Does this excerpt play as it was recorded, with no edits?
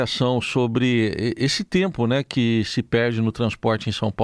yes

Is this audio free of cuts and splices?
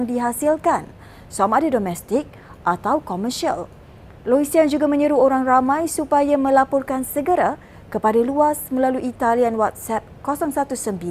yes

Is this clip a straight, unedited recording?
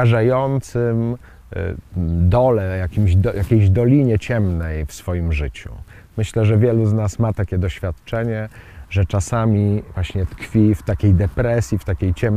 yes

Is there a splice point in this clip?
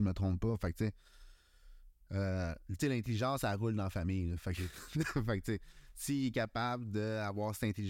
no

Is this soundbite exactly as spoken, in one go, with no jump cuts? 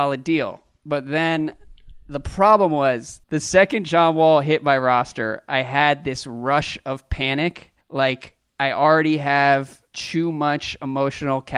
no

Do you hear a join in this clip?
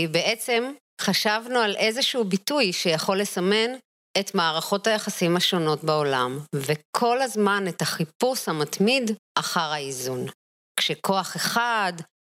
no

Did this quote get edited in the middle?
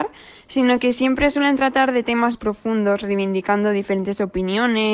yes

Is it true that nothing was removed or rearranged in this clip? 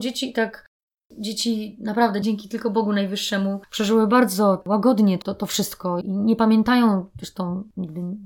no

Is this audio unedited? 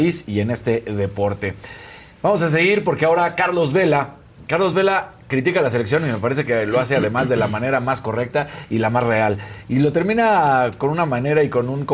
yes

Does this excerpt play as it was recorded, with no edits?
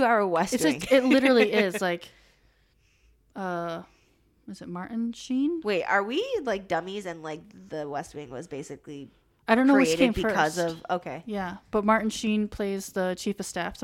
no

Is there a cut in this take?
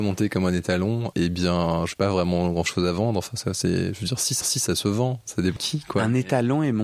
yes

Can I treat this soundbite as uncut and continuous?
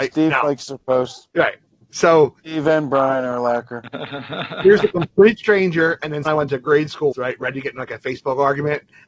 no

